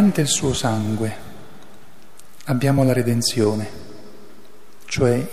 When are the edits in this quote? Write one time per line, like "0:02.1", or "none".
none